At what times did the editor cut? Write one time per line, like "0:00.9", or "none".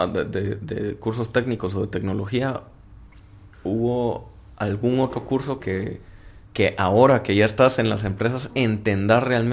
0:03.5
0:05.6
0:06.4